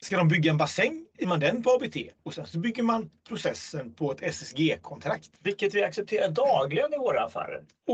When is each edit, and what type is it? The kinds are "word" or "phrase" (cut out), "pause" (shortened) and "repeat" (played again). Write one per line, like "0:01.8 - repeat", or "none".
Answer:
0:01.2 - phrase
0:02.2 - pause
0:05.4 - pause